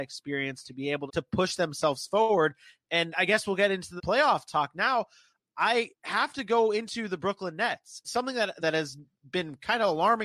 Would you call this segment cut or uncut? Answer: cut